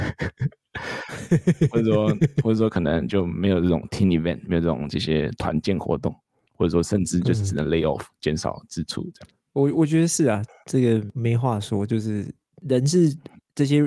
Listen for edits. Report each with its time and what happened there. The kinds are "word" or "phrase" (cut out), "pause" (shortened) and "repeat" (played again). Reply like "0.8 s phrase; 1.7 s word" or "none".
none